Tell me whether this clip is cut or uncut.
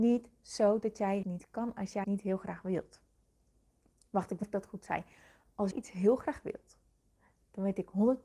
cut